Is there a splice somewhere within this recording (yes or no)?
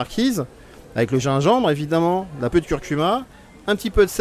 yes